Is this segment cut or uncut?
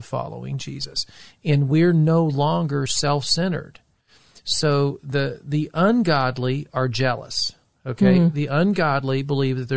uncut